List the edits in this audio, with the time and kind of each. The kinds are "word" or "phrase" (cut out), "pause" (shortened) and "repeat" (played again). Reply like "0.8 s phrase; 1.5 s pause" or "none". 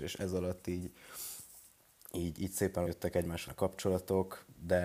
2.4 s word; 2.9 s word; 3.5 s word